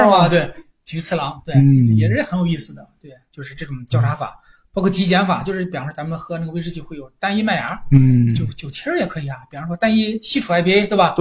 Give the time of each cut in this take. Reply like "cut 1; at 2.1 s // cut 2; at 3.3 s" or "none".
none